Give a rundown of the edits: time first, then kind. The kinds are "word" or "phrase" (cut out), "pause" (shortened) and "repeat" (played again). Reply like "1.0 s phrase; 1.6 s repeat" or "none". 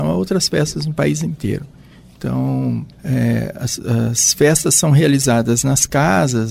2.9 s pause